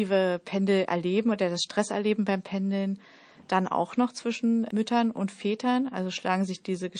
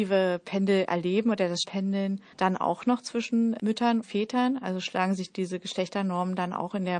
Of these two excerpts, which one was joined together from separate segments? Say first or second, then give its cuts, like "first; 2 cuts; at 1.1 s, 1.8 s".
second; 3 cuts; at 1.6 s, 2.3 s, 4.0 s